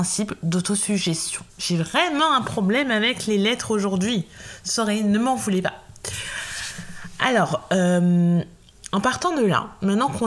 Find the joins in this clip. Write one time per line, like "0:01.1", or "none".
0:01.5